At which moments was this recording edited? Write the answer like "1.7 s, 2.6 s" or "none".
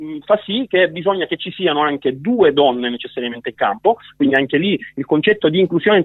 none